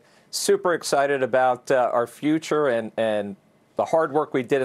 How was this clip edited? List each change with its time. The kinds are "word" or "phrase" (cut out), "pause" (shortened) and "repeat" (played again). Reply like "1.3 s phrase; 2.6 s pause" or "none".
none